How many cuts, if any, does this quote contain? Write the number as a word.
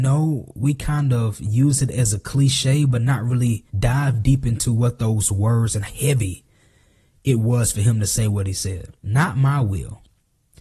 three